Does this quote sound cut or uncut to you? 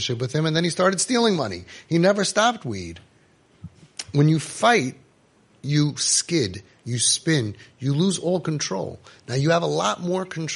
uncut